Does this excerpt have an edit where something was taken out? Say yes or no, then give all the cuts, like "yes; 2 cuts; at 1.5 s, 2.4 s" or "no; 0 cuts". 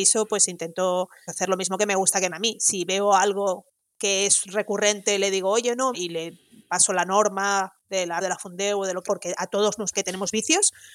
yes; 6 cuts; at 1.3 s, 2.3 s, 5.9 s, 8.2 s, 9.1 s, 9.9 s